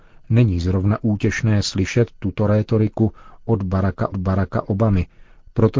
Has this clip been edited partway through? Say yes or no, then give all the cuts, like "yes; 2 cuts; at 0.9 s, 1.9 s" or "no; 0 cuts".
yes; 1 cut; at 4.1 s